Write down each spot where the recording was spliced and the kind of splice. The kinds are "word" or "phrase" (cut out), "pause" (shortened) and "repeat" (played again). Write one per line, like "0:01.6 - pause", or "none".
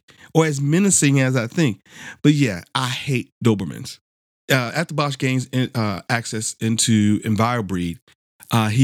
none